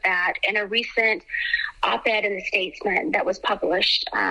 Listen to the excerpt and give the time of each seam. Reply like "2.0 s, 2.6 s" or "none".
none